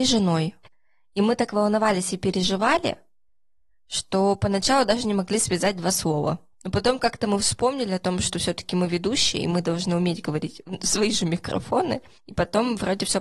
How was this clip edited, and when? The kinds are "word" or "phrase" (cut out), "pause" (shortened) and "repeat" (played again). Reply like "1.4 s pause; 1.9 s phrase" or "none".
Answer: none